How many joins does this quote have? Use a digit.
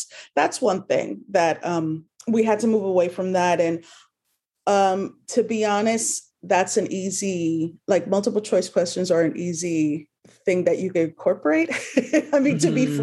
3